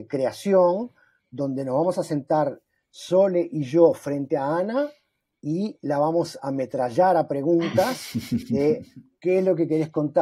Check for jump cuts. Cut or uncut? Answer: uncut